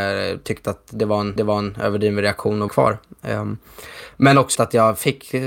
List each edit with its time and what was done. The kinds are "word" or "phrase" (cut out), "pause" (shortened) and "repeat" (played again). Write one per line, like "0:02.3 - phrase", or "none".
0:01.4 - repeat
0:02.7 - phrase
0:04.6 - word